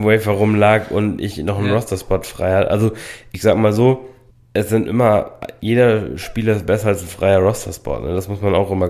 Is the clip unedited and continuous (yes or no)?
yes